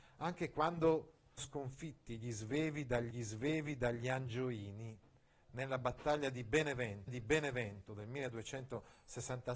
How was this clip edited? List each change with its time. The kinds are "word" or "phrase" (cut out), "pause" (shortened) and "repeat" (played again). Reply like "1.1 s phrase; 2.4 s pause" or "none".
1.4 s word; 3.1 s repeat; 7.1 s repeat